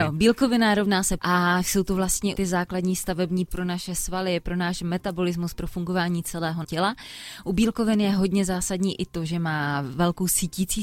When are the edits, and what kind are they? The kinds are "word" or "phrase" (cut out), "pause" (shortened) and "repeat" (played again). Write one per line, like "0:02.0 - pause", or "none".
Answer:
0:01.2 - word
0:02.4 - word
0:03.5 - word
0:06.6 - word